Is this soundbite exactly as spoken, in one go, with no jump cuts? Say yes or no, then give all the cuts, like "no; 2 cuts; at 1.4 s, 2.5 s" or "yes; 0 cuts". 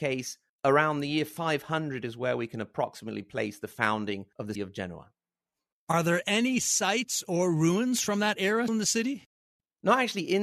no; 2 cuts; at 4.6 s, 8.7 s